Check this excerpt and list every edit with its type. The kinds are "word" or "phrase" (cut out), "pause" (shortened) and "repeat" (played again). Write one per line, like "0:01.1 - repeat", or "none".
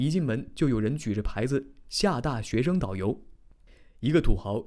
none